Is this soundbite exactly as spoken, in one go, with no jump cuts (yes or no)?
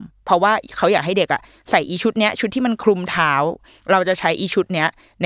yes